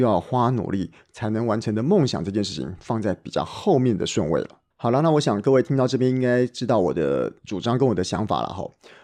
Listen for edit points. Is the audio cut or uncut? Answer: cut